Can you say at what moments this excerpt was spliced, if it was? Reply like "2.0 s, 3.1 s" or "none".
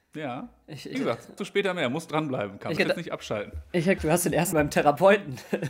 0.9 s, 1.4 s, 2.8 s, 4.0 s, 4.5 s